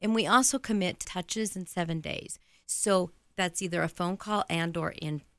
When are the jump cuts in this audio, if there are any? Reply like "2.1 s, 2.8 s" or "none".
1.0 s